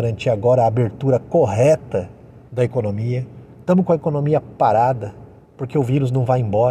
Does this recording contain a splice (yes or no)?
yes